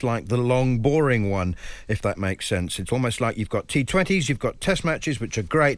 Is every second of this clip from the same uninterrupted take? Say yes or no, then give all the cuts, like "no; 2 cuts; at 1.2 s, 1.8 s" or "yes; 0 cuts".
yes; 0 cuts